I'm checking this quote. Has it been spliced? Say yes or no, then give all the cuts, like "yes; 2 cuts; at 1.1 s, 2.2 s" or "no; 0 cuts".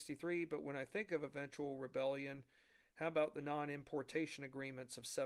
no; 0 cuts